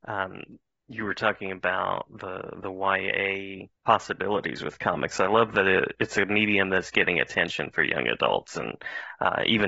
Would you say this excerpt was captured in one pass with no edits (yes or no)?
no